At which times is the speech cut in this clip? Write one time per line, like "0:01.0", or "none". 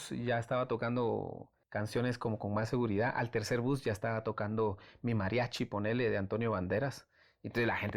0:01.6

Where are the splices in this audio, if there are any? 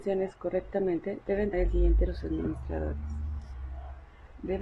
0:01.5
0:02.1

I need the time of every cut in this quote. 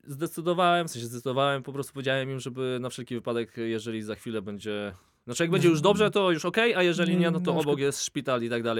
none

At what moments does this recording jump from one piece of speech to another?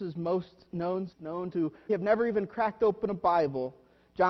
0:01.1
0:01.5
0:01.9

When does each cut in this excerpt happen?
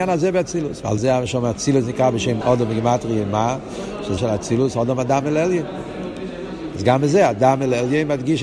0:01.0
0:02.4
0:04.2

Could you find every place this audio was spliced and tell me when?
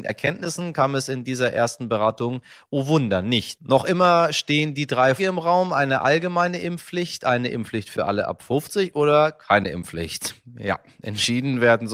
0:05.2

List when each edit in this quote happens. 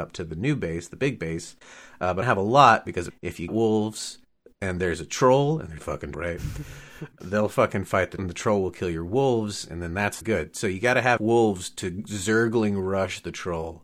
0:02.2
0:03.1
0:03.5
0:05.8
0:06.1
0:07.2
0:08.2
0:10.2
0:11.2

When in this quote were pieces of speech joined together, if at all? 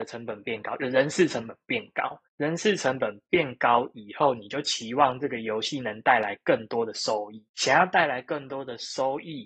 0:02.3
0:07.5

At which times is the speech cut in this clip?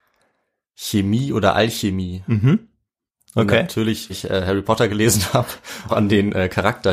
0:04.1
0:05.9

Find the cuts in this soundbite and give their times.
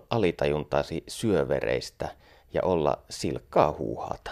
none

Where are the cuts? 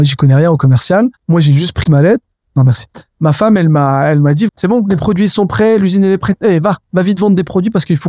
0:01.2
0:01.8
0:04.5

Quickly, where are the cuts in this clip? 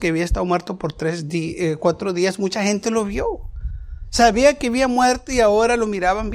none

